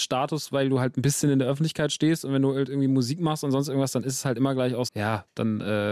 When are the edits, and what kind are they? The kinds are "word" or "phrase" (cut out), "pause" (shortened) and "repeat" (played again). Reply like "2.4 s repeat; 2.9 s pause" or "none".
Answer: 4.9 s word